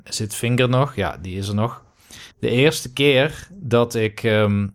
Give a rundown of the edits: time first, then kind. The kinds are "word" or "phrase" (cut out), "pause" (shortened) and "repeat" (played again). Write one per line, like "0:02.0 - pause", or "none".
0:02.3 - pause